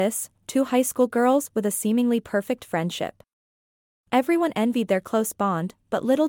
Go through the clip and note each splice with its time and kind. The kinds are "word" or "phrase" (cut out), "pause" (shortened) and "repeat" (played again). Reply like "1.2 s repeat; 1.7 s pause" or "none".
none